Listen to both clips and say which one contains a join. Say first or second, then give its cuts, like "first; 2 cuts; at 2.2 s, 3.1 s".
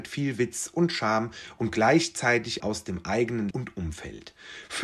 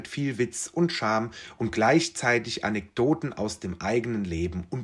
first; 2 cuts; at 2.6 s, 3.5 s